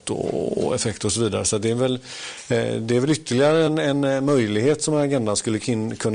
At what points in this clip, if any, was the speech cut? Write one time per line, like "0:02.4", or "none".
none